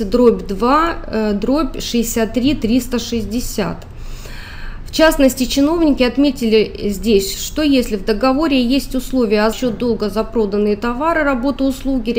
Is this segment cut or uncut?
cut